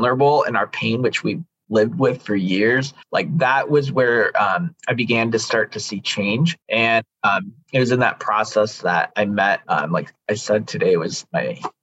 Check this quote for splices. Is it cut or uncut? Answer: cut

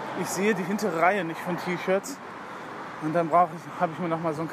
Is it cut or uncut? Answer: uncut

